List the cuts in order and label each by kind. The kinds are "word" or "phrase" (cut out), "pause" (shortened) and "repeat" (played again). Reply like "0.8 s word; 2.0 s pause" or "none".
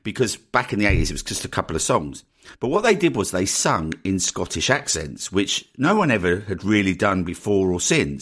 2.5 s pause